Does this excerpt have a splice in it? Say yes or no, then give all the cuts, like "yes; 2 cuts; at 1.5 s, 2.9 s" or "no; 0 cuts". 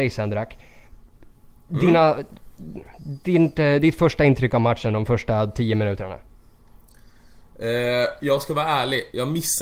no; 0 cuts